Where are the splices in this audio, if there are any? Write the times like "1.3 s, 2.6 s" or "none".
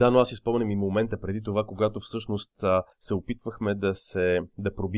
2.9 s